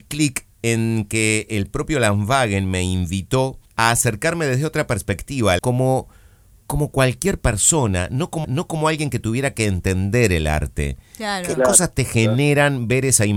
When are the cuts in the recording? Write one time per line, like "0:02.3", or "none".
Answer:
0:03.7
0:05.6
0:08.4